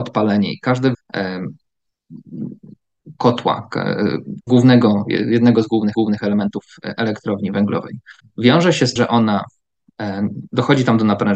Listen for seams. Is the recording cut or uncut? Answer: cut